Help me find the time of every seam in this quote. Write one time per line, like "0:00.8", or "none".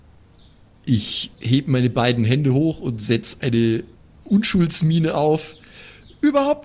0:04.0